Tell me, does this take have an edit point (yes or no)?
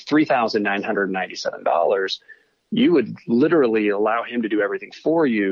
no